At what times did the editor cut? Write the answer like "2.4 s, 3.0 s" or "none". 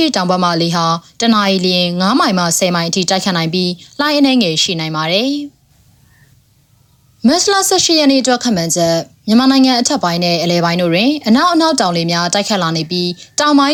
none